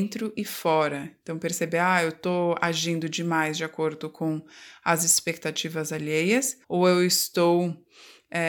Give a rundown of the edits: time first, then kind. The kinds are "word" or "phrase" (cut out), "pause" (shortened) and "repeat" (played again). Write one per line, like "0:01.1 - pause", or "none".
0:06.6 - pause